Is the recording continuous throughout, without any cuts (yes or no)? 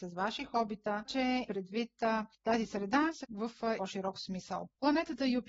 no